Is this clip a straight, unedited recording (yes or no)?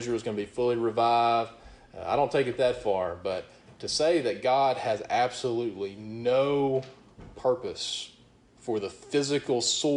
yes